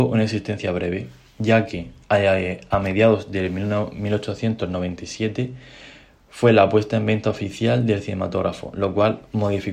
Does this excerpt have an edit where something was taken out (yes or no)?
no